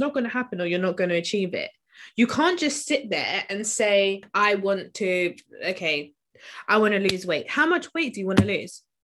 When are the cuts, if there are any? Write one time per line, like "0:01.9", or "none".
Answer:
none